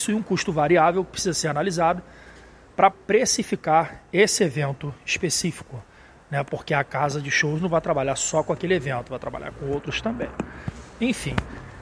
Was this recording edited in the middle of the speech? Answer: yes; 1 cut; at 2.9 s

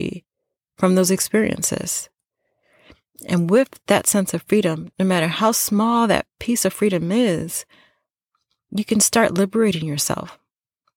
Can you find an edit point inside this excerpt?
no; 0 cuts

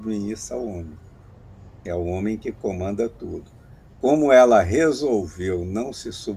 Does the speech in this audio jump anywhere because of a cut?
no; 0 cuts

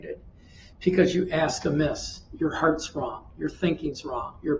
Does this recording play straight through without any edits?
yes; 0 cuts

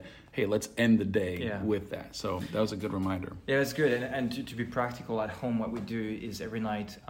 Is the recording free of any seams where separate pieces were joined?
yes; 0 cuts

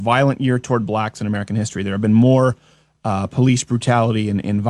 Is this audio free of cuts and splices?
yes; 0 cuts

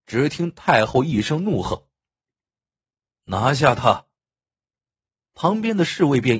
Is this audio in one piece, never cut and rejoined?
yes; 0 cuts

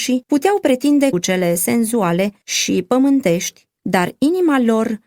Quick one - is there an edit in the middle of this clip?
yes; 2 cuts; at 1.1 s, 3.8 s

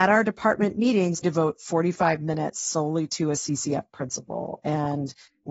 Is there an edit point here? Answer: yes; 1 cut; at 1.2 s

